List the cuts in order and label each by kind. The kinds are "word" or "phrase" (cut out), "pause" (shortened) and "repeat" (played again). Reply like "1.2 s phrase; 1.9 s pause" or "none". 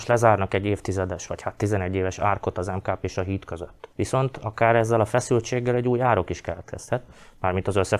3.9 s pause